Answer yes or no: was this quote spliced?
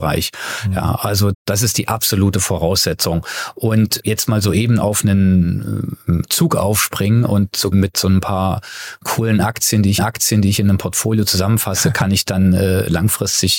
yes